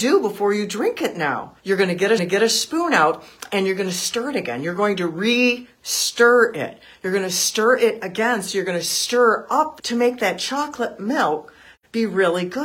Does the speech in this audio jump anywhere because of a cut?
yes; 3 cuts; at 1.6 s, 2.2 s, 9.8 s

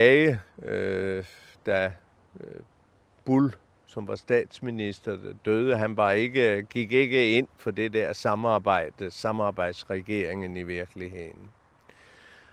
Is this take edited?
no; 0 cuts

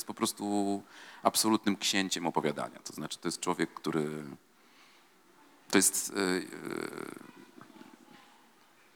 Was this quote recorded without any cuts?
yes; 0 cuts

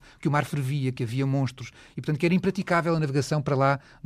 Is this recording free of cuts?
yes; 0 cuts

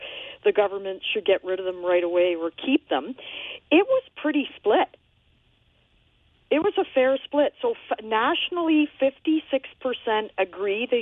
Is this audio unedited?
yes; 0 cuts

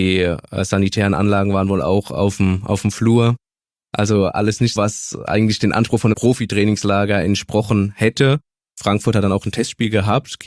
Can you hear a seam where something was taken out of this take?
yes; 2 cuts; at 4.8 s, 6.1 s

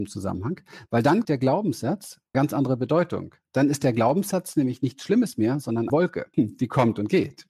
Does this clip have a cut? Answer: yes; 4 cuts; at 1.2 s, 2.3 s, 5.9 s, 6.3 s

